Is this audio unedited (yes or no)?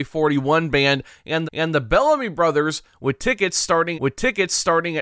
no